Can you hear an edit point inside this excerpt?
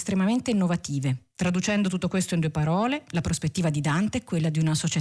no; 0 cuts

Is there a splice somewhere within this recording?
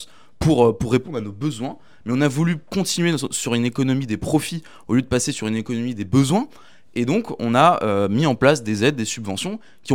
no; 0 cuts

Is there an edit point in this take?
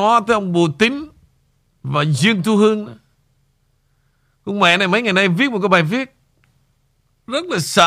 no; 0 cuts

